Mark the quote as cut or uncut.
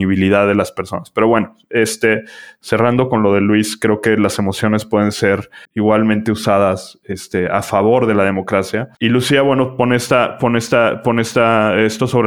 cut